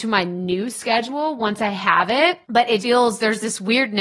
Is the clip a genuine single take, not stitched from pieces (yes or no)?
no